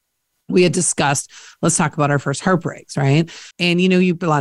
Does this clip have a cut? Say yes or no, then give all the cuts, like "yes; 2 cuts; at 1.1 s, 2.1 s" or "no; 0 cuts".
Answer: yes; 1 cut; at 3.5 s